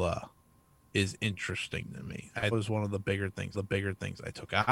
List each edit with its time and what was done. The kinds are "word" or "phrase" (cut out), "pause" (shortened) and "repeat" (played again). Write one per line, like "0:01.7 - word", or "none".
0:02.5 - phrase
0:03.5 - repeat